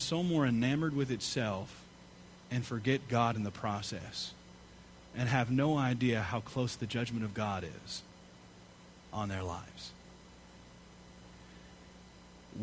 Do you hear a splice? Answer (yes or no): no